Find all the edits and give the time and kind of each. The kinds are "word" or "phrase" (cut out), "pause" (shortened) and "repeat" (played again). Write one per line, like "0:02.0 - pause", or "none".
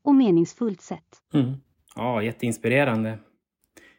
0:01.7 - pause